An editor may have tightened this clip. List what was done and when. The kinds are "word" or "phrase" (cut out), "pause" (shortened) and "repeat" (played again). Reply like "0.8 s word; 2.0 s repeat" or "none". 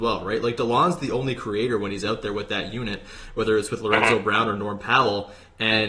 none